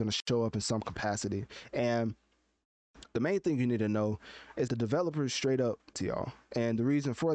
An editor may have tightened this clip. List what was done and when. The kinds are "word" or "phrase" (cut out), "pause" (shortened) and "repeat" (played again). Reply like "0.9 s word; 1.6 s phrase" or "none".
3.1 s word; 4.7 s word; 5.9 s word